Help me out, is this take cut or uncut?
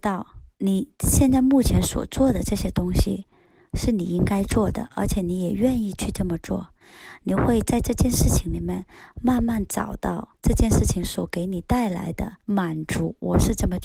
uncut